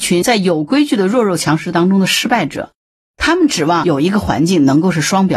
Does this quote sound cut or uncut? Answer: uncut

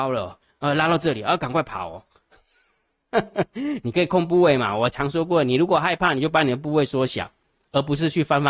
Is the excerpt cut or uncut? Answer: uncut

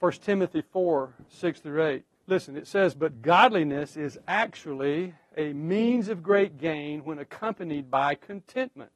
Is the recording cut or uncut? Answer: cut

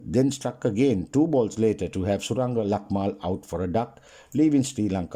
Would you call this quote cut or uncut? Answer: uncut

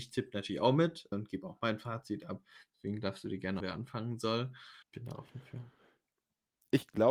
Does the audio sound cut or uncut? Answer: cut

